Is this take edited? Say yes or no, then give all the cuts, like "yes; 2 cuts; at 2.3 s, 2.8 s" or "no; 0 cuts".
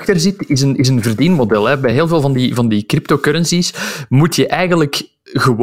no; 0 cuts